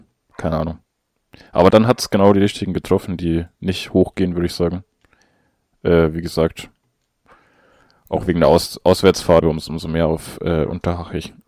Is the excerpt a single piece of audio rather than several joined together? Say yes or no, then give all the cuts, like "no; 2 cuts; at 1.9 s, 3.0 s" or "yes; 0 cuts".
no; 2 cuts; at 1.7 s, 9.4 s